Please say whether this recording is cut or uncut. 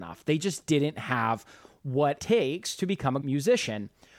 cut